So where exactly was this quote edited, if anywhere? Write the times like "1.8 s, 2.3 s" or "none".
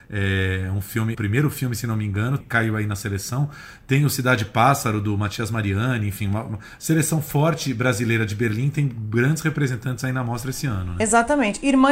1.1 s, 2.4 s